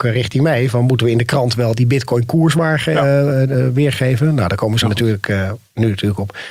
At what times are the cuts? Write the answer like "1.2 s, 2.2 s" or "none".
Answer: 4.8 s